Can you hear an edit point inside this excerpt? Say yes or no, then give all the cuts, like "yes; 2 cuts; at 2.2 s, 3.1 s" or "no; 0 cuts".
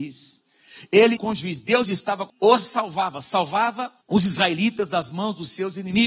yes; 3 cuts; at 1.2 s, 2.3 s, 4.0 s